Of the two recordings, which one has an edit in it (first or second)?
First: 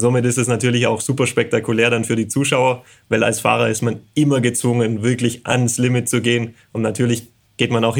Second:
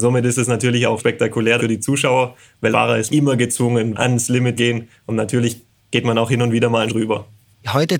second